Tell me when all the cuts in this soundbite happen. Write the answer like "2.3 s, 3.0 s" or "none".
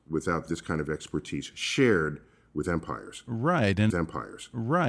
3.9 s

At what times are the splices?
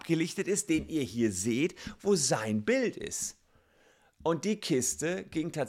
none

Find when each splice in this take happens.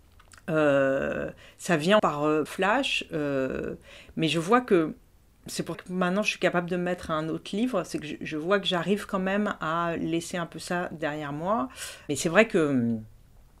2.0 s, 2.5 s, 5.7 s

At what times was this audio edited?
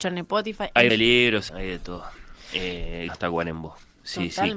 0.9 s, 1.5 s, 3.1 s

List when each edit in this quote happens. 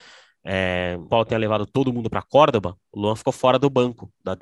1.1 s

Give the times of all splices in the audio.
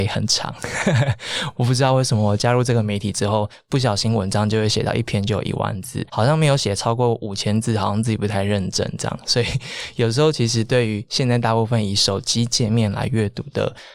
6.1 s

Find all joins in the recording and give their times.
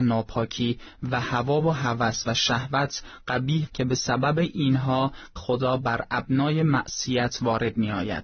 3.7 s, 5.4 s

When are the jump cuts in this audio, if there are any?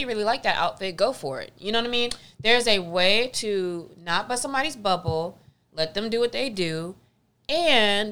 none

